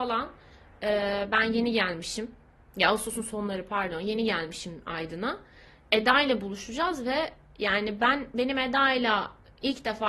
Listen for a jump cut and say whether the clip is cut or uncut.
uncut